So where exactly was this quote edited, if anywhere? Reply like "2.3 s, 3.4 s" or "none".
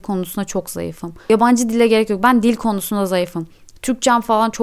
none